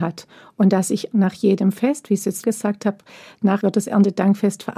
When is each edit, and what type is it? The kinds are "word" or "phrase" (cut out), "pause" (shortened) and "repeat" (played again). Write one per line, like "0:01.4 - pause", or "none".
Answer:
0:01.1 - word
0:02.4 - word
0:03.6 - word